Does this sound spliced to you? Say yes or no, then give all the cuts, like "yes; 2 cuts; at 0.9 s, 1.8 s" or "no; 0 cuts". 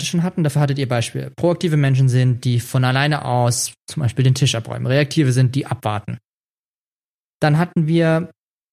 no; 0 cuts